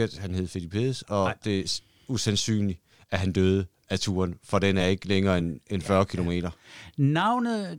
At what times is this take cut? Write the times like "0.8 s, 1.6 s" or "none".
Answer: none